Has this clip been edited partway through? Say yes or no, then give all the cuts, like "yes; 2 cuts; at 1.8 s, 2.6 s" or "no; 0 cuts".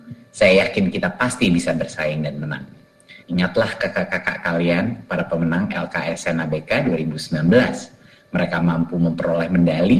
yes; 1 cut; at 3.2 s